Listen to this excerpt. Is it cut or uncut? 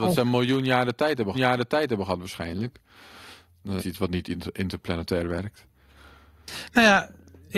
cut